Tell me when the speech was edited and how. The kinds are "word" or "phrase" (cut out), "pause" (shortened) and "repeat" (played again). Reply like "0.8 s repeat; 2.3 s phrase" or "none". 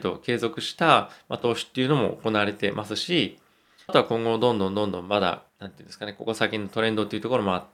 3.9 s phrase; 5.5 s pause